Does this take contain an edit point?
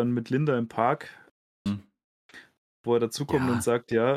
yes; 1 cut; at 1.7 s

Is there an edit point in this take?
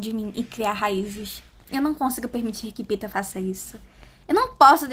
no; 0 cuts

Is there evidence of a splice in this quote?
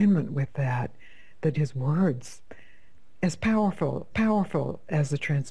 yes; 2 cuts; at 1.5 s, 4.1 s

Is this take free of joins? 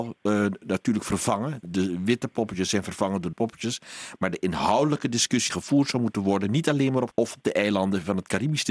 no; 4 cuts; at 1.6 s, 3.3 s, 5.5 s, 7.1 s

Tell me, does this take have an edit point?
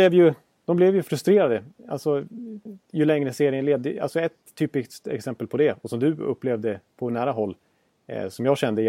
no; 0 cuts

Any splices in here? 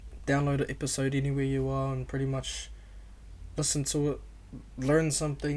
no; 0 cuts

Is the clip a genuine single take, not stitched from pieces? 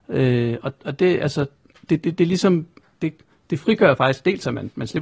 yes; 0 cuts

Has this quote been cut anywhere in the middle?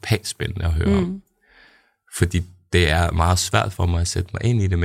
no; 0 cuts

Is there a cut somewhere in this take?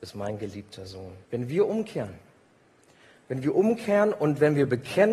yes; 1 cut; at 1.2 s

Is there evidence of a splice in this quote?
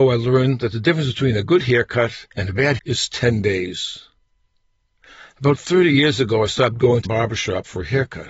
yes; 3 cuts; at 2.3 s, 2.8 s, 7.0 s

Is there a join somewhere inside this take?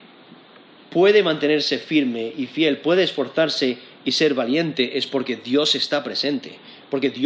no; 0 cuts

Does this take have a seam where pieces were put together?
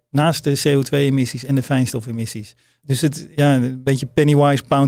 no; 0 cuts

